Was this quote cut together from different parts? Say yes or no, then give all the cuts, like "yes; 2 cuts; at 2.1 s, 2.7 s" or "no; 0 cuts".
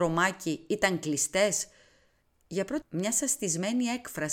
yes; 2 cuts; at 2.2 s, 2.8 s